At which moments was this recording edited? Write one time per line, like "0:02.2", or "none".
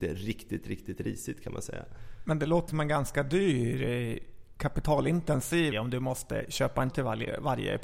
0:02.7
0:05.7
0:06.9